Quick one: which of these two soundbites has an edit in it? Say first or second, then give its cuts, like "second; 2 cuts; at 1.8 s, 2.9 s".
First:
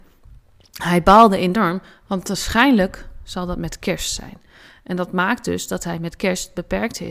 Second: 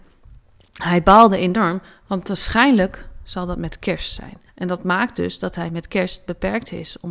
second; 1 cut; at 4.5 s